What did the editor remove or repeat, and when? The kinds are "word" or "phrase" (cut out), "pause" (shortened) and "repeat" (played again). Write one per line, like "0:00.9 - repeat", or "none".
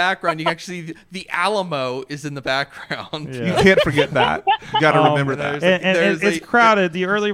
none